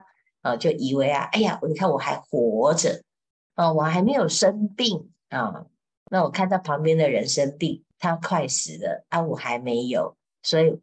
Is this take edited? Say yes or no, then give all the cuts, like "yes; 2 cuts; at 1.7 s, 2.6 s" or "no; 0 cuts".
yes; 1 cut; at 7.9 s